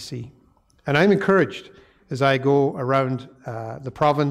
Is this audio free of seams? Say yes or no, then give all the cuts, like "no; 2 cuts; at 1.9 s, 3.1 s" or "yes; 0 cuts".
yes; 0 cuts